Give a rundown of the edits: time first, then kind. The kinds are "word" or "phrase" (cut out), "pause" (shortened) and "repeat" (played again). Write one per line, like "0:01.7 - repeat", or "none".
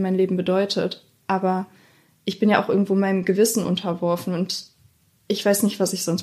none